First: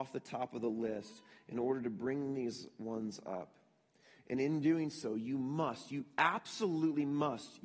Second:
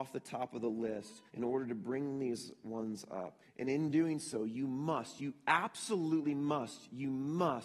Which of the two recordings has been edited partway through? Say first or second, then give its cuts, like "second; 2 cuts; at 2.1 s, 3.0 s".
second; 2 cuts; at 1.3 s, 3.4 s